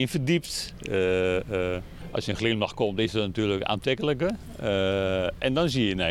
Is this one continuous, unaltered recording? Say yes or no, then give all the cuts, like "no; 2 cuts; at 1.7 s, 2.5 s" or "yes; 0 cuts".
yes; 0 cuts